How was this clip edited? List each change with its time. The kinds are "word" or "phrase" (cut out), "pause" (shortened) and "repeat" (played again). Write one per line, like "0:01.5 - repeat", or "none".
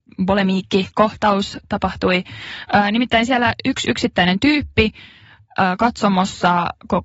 none